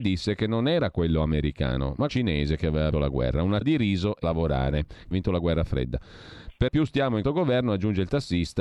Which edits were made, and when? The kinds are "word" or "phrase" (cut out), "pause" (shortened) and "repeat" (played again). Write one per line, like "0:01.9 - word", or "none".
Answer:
0:02.1 - word
0:02.9 - word
0:03.6 - word
0:04.2 - word
0:05.1 - word
0:06.7 - word
0:07.2 - word